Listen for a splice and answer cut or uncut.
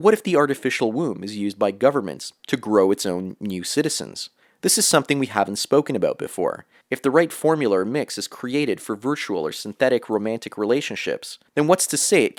cut